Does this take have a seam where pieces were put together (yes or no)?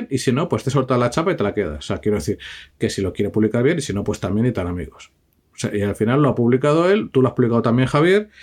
no